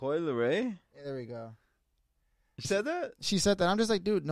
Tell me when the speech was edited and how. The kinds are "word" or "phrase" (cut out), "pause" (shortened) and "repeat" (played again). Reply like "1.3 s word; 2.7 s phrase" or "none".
2.6 s word